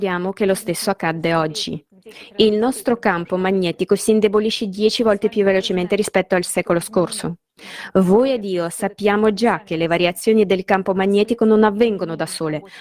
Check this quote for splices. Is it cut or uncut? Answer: uncut